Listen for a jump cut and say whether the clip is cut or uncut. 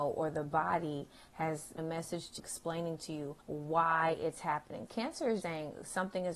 cut